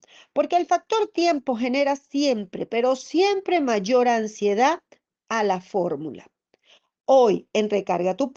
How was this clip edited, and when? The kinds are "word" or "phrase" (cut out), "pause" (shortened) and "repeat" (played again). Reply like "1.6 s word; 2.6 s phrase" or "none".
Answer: none